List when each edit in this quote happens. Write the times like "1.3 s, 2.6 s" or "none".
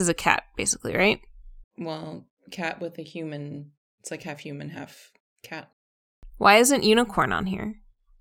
1.7 s, 3.8 s, 5.2 s